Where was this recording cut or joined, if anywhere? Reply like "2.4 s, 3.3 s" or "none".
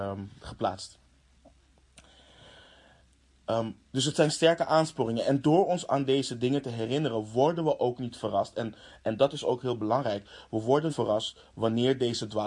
3.8 s, 5.9 s, 10.9 s